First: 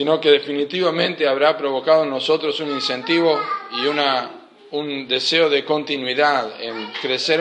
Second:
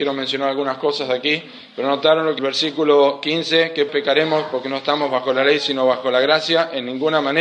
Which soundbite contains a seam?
second; 2 cuts; at 2.4 s, 3.9 s

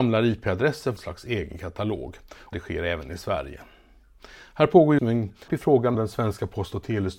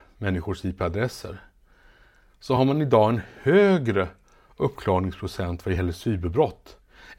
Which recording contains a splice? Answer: first; 5 cuts; at 1.0 s, 2.5 s, 5.0 s, 5.5 s, 5.9 s

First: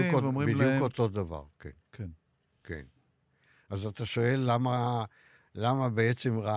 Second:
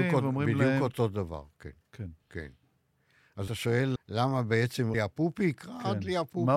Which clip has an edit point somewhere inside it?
second; 4 cuts; at 2.2 s, 3.5 s, 4.0 s, 4.9 s

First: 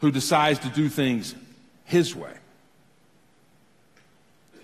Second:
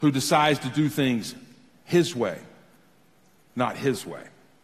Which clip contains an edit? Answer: first; 1 cut; at 2.1 s

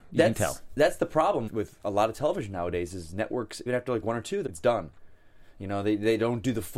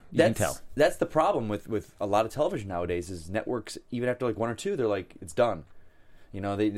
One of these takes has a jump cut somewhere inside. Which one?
first; 3 cuts; at 1.5 s, 3.7 s, 4.5 s

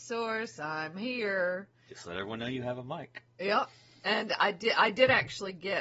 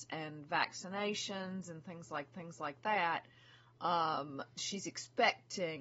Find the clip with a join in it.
second; 2 cuts; at 2.3 s, 4.6 s

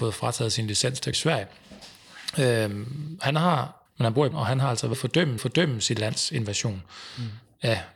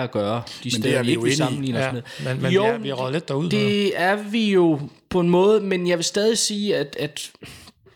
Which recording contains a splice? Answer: first; 5 cuts; at 1.1 s, 3.9 s, 4.3 s, 4.9 s, 5.4 s

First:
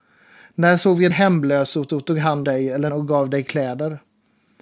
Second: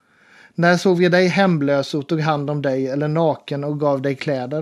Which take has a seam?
first; 4 cuts; at 1.1 s, 1.9 s, 2.4 s, 2.9 s

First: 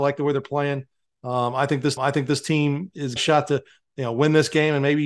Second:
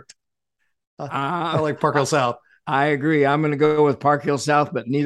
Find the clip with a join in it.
first; 2 cuts; at 2.0 s, 3.2 s

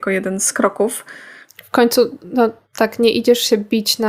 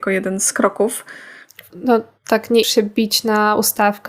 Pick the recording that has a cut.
second; 2 cuts; at 1.7 s, 2.6 s

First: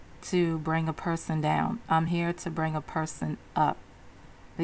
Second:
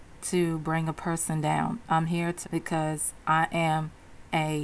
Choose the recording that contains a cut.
second; 1 cut; at 2.4 s

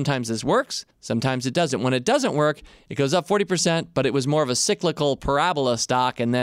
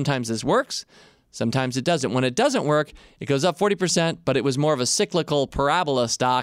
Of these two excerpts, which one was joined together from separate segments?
first; 1 cut; at 0.9 s

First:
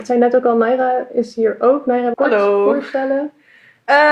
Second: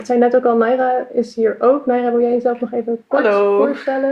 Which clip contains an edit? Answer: first; 1 cut; at 2.1 s

